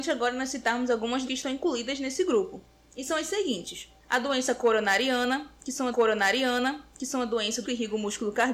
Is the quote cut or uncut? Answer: cut